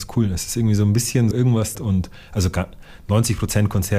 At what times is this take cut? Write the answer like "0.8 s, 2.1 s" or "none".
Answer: 1.3 s, 1.7 s